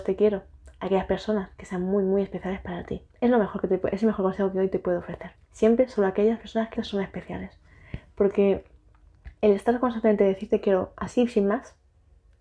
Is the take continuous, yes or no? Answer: no